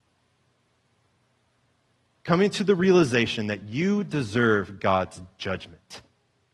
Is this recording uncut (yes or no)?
yes